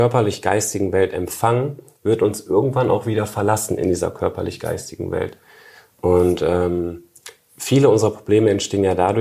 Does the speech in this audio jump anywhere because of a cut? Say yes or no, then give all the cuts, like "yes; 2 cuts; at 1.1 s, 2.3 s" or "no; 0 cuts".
no; 0 cuts